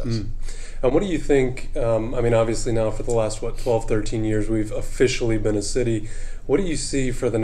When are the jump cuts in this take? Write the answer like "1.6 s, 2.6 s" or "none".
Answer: none